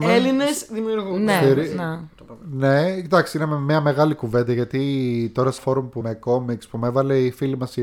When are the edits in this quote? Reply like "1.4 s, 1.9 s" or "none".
5.6 s, 6.0 s